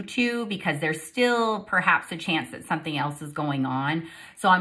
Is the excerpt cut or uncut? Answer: uncut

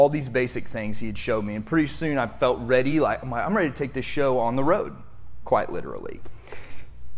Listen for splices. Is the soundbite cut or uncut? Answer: uncut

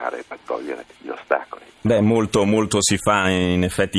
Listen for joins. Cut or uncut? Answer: cut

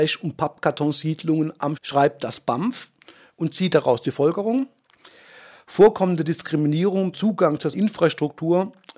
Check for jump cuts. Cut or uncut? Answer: cut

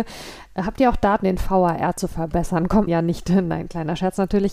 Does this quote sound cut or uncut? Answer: cut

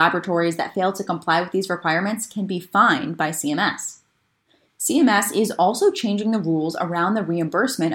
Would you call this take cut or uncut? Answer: uncut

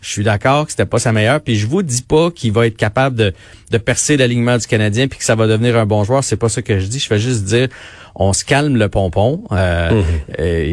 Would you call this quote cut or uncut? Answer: uncut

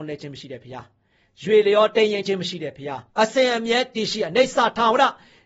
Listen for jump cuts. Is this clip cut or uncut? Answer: cut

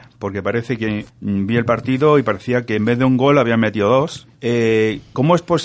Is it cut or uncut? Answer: cut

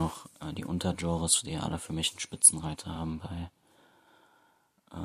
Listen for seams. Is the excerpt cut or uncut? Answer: uncut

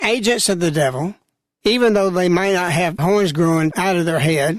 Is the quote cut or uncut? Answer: uncut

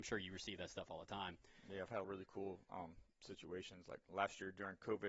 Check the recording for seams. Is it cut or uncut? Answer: cut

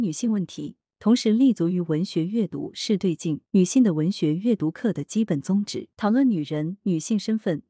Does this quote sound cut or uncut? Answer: cut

